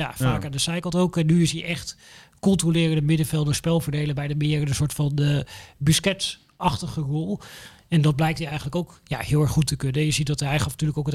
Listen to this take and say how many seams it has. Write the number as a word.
zero